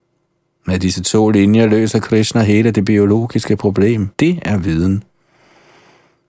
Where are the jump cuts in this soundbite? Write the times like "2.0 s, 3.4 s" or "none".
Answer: 4.1 s